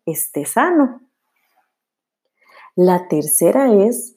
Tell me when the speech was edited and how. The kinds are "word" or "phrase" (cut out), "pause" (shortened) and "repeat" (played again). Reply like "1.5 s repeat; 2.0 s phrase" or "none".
none